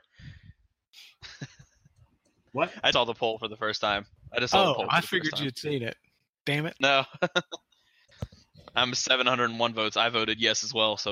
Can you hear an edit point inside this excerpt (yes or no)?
yes